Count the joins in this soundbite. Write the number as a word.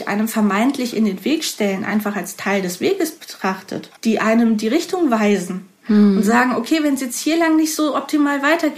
one